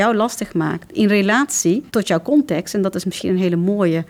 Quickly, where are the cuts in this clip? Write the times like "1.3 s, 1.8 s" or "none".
1.9 s